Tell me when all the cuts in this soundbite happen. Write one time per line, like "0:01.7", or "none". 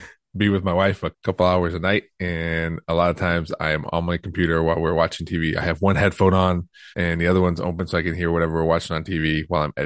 0:01.1
0:06.9